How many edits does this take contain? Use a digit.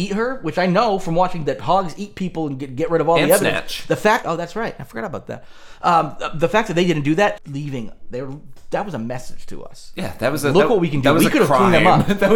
3